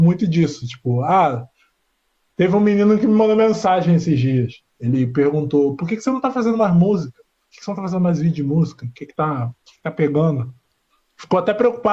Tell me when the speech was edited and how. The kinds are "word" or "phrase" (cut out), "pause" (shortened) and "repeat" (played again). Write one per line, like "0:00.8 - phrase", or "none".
none